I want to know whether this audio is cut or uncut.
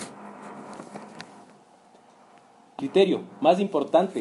cut